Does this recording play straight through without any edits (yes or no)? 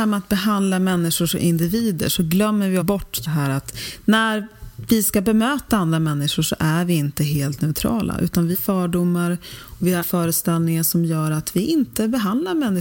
no